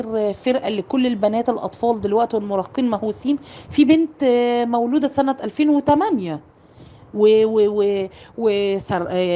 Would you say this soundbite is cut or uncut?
uncut